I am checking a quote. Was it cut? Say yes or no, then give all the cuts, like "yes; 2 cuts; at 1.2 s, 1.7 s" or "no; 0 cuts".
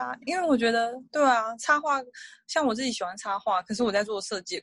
yes; 1 cut; at 1.1 s